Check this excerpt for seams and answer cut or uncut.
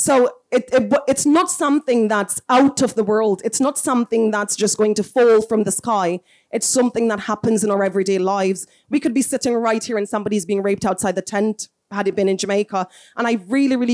uncut